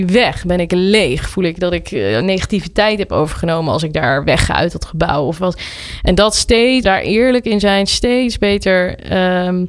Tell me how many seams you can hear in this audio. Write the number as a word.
one